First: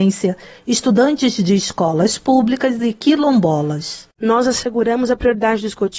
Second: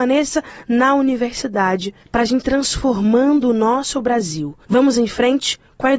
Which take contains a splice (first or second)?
second